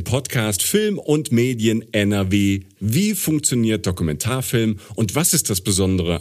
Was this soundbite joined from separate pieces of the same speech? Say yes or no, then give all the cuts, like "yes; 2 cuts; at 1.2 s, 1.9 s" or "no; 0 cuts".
no; 0 cuts